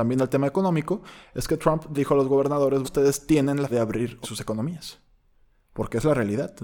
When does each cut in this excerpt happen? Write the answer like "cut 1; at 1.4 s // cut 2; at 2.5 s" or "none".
cut 1; at 1.9 s // cut 2; at 2.8 s // cut 3; at 3.7 s // cut 4; at 4.2 s